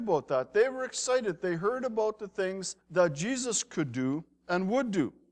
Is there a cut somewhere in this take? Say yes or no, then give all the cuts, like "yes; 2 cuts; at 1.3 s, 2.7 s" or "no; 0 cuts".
yes; 1 cut; at 2.8 s